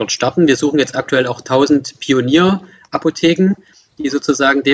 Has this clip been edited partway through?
no; 0 cuts

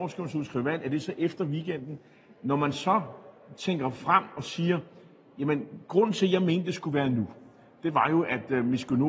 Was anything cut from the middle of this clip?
no; 0 cuts

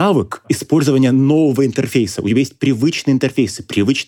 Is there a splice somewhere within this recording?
no; 0 cuts

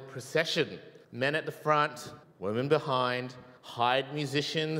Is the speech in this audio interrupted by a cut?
yes; 3 cuts; at 1.0 s, 2.2 s, 3.6 s

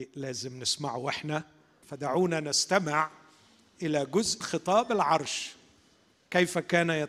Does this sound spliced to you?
yes; 2 cuts; at 1.8 s, 4.4 s

